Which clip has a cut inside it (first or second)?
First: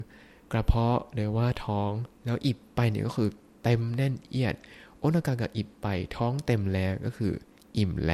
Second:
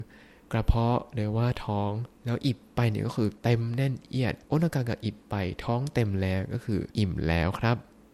second